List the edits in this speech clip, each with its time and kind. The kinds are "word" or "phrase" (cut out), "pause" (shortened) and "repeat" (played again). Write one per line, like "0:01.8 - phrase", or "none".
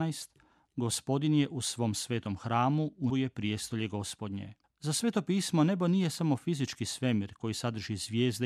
0:03.1 - word
0:04.6 - pause